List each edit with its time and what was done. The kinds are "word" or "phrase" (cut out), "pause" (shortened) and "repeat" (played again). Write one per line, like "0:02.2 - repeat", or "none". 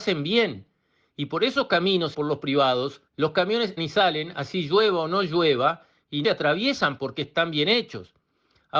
0:02.1 - word
0:03.1 - pause
0:03.8 - word
0:06.2 - phrase
0:07.0 - word